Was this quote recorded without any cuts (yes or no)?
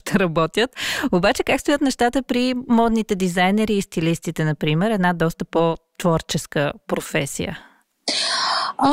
yes